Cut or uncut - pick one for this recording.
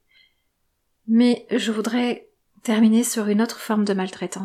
uncut